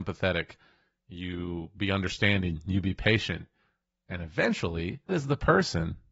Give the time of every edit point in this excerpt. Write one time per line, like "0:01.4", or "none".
0:05.1